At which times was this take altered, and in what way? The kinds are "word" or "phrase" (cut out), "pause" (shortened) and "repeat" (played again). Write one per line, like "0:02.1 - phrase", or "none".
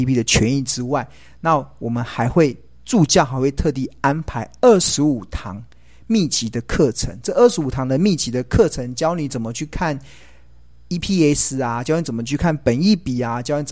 none